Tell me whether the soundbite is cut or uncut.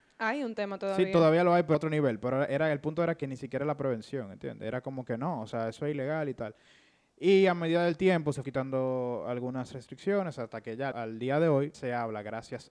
cut